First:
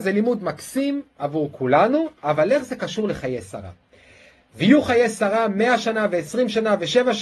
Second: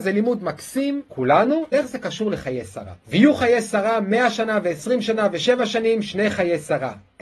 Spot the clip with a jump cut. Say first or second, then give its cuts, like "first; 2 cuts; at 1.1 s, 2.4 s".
second; 3 cuts; at 1.1 s, 1.7 s, 3.0 s